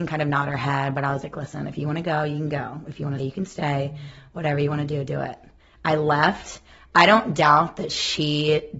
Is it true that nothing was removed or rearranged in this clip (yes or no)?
no